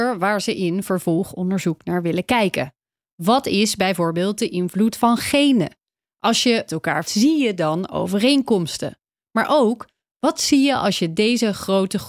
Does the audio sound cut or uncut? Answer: cut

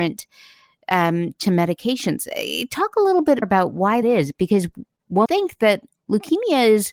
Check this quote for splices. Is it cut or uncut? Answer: cut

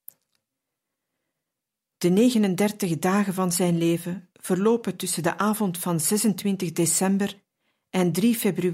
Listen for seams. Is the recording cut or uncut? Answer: uncut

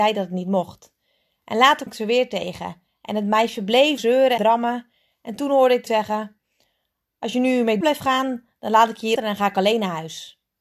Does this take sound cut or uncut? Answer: cut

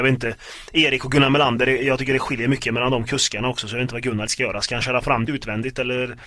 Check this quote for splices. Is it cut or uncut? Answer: cut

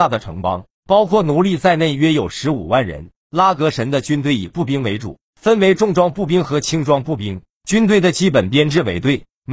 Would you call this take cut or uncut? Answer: uncut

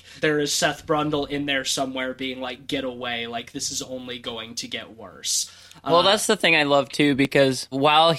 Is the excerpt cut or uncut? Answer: uncut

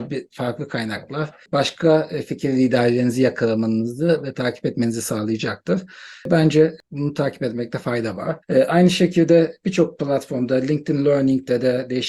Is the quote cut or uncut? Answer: cut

